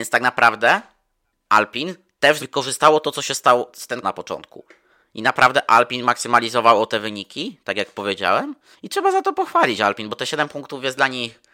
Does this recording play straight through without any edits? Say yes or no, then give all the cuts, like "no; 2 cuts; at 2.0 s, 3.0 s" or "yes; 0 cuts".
no; 3 cuts; at 2.4 s, 4.0 s, 8.7 s